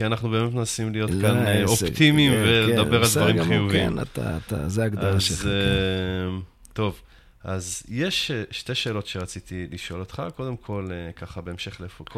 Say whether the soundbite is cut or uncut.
uncut